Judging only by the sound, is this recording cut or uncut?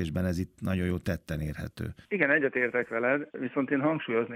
uncut